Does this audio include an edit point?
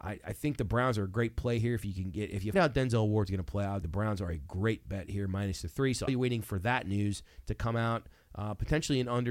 yes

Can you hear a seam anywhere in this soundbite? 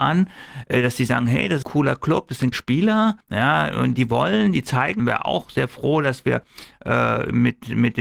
yes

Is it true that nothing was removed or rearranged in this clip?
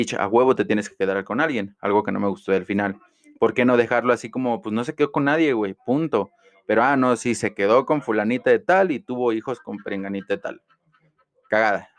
yes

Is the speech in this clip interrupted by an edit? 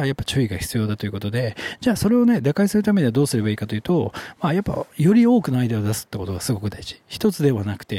no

